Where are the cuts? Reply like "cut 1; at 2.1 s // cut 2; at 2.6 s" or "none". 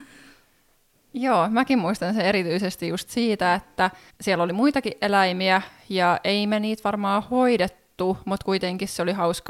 cut 1; at 4.1 s